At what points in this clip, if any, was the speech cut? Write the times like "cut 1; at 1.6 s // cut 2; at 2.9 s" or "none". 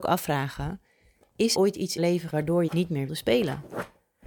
cut 1; at 1.5 s // cut 2; at 2.0 s // cut 3; at 2.3 s // cut 4; at 2.7 s // cut 5; at 3.1 s